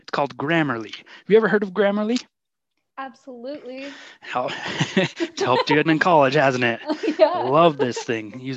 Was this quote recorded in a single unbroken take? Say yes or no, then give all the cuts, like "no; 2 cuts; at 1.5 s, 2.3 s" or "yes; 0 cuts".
no; 1 cut; at 5.9 s